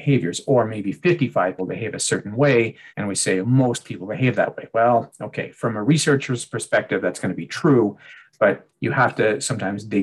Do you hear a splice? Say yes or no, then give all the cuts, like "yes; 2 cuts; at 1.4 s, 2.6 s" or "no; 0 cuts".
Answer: yes; 3 cuts; at 1.6 s, 2.9 s, 3.4 s